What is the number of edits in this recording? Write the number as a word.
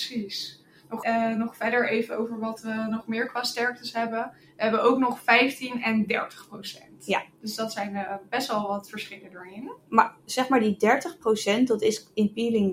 two